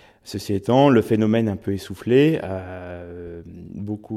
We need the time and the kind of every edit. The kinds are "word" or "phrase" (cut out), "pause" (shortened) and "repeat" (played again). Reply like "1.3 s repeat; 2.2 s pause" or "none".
none